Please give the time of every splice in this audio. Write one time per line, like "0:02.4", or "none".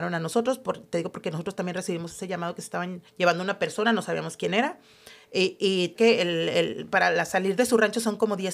0:03.1
0:05.9